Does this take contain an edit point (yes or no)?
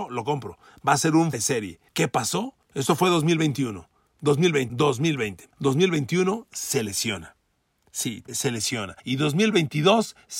yes